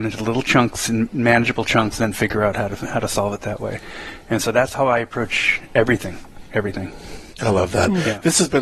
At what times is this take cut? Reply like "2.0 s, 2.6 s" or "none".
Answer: none